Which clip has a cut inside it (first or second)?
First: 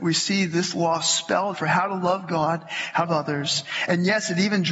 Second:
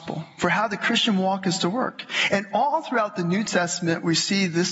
first